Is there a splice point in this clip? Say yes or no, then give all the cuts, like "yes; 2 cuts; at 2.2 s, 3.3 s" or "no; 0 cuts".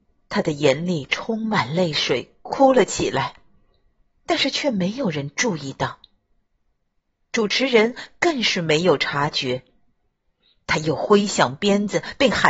no; 0 cuts